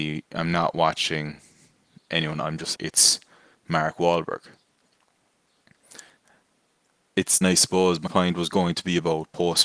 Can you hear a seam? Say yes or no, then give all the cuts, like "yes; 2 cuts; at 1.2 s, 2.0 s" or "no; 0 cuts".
yes; 3 cuts; at 2.7 s, 7.4 s, 8.1 s